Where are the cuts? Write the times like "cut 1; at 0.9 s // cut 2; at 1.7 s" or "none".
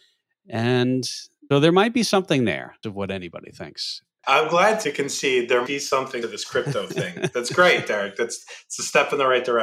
cut 1; at 1.5 s // cut 2; at 2.8 s // cut 3; at 4.8 s // cut 4; at 5.7 s // cut 5; at 6.2 s